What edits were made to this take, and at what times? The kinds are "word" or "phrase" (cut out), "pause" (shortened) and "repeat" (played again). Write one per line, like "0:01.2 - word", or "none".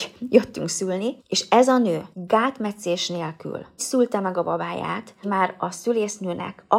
0:01.2 - pause
0:02.1 - pause
0:03.8 - word
0:05.2 - word